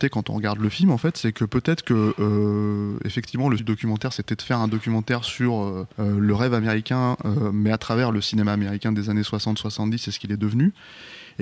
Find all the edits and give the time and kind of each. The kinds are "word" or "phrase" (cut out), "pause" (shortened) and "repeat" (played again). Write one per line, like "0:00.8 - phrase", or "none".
0:03.6 - word
0:05.9 - pause